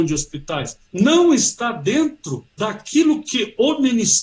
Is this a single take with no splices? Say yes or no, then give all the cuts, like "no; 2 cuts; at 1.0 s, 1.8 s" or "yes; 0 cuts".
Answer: yes; 0 cuts